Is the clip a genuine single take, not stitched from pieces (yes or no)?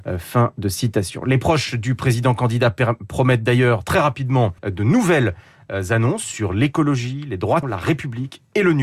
no